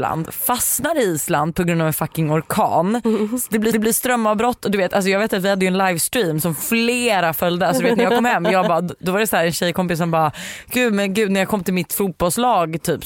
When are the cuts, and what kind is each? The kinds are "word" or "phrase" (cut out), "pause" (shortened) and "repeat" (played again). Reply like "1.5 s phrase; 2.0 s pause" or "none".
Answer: 3.7 s repeat